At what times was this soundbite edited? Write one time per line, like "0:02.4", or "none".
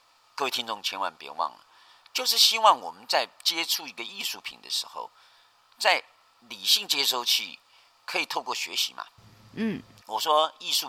none